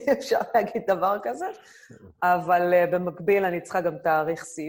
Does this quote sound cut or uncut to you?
uncut